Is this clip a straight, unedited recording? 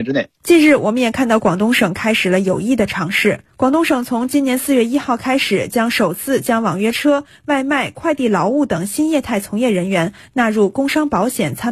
no; 1 cut; at 3.5 s

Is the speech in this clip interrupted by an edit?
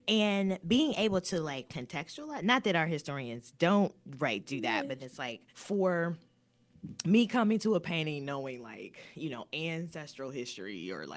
yes; 3 cuts; at 1.7 s, 5.0 s, 5.5 s

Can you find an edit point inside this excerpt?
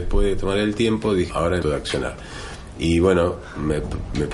yes; 2 cuts; at 1.3 s, 1.6 s

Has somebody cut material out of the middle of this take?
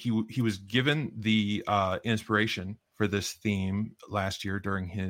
yes; 1 cut; at 2.9 s

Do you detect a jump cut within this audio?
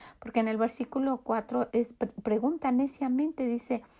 yes; 1 cut; at 1.7 s

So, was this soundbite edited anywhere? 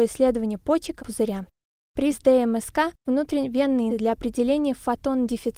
yes; 4 cuts; at 1.0 s, 2.1 s, 3.1 s, 3.9 s

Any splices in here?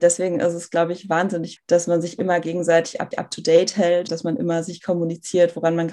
yes; 4 cuts; at 1.6 s, 3.1 s, 4.1 s, 4.8 s

